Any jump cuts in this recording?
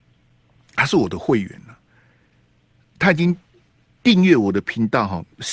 no; 0 cuts

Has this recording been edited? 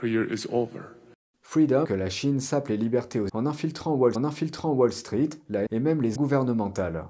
yes; 5 cuts; at 1.8 s, 3.3 s, 4.2 s, 5.7 s, 6.2 s

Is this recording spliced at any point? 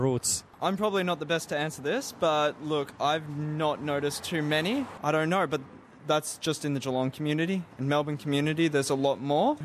no; 0 cuts

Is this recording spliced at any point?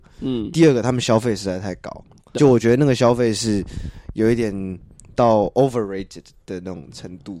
yes; 1 cut; at 2.4 s

